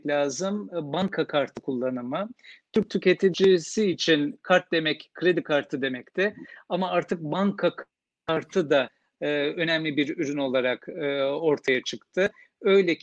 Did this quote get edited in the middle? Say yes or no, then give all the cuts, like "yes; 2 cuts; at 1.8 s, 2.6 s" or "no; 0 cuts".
no; 0 cuts